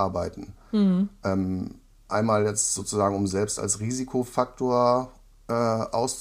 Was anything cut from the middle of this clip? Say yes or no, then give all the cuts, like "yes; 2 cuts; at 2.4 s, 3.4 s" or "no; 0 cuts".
no; 0 cuts